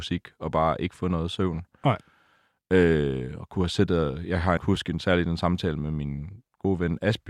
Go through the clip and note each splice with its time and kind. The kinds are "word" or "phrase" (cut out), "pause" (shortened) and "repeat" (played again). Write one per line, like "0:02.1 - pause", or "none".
0:04.6 - word